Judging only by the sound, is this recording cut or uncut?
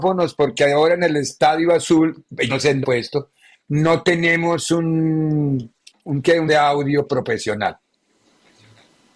cut